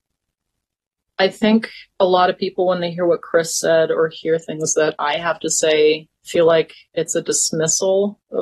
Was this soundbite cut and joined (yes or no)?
yes